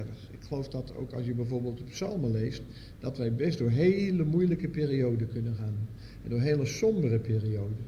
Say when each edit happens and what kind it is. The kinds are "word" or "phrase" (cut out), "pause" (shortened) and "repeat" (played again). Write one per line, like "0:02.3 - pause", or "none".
none

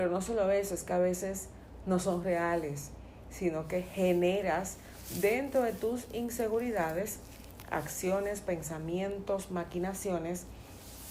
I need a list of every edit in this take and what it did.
none

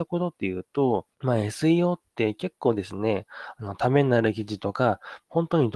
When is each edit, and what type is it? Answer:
0:01.1 - pause

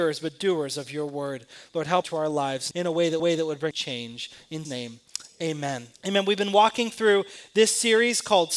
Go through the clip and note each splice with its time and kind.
0:02.0 - phrase
0:02.7 - word
0:03.2 - repeat
0:03.7 - word
0:04.6 - word
0:05.9 - pause

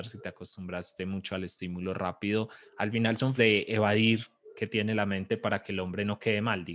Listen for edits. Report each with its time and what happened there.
0:03.4 - word

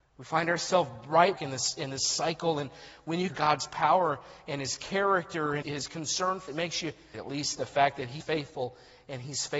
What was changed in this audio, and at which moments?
0:01.4 - word
0:03.3 - word
0:05.6 - word
0:06.5 - word
0:07.1 - word
0:08.2 - word

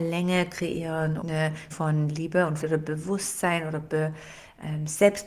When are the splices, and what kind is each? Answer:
0:01.2 - word
0:01.7 - word
0:02.6 - word

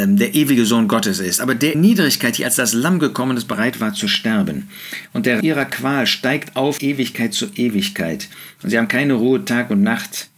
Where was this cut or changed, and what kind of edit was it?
0:01.7 - word
0:05.4 - word
0:06.8 - word

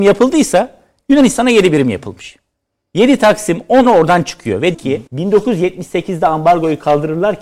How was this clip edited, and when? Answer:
0:03.8 - word
0:04.7 - word
0:05.1 - pause

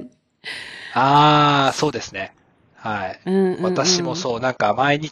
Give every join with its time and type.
none

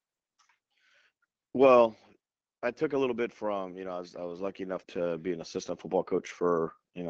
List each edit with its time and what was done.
0:04.8 - word

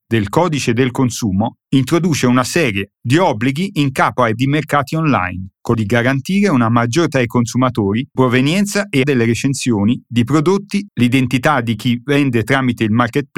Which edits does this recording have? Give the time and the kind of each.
0:02.9 - word
0:04.4 - word
0:05.7 - word
0:07.1 - word
0:08.2 - word
0:09.0 - word
0:10.9 - word

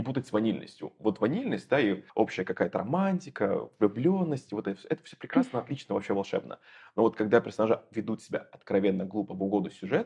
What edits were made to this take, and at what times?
0:02.1 - pause

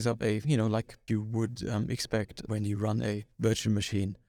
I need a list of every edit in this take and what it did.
0:01.1 - word
0:02.5 - word

